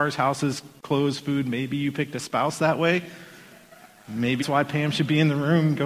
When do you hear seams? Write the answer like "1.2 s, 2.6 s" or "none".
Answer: 4.4 s